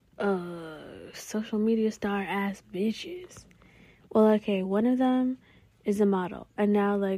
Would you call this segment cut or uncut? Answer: uncut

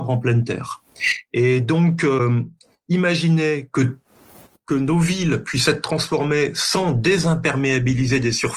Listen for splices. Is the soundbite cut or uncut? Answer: uncut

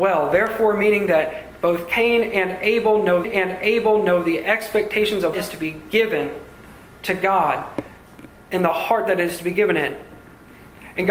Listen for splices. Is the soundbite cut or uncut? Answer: cut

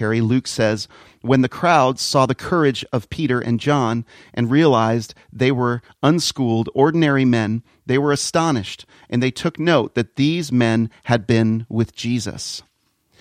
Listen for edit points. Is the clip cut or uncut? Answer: uncut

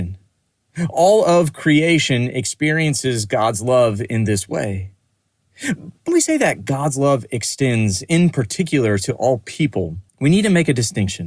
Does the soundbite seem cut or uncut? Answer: cut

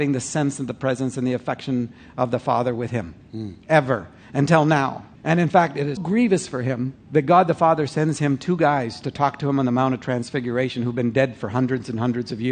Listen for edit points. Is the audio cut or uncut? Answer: cut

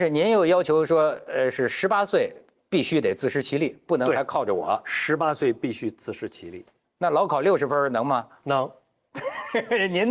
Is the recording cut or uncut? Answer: uncut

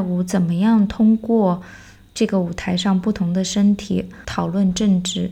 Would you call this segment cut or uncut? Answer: uncut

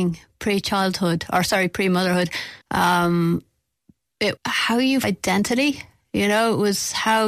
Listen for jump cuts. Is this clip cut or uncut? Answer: cut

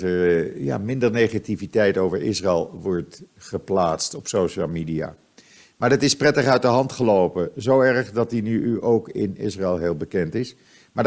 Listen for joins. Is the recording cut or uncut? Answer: uncut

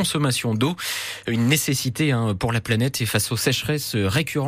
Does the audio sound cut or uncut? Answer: uncut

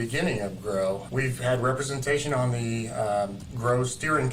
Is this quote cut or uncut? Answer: cut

